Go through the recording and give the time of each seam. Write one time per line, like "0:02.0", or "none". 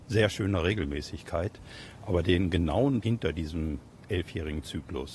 0:03.0